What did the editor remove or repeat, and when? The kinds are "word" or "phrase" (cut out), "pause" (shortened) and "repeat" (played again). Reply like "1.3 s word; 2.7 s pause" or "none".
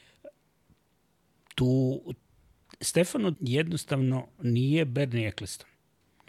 3.3 s word